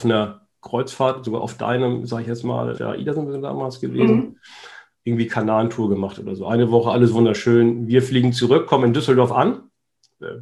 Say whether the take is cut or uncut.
cut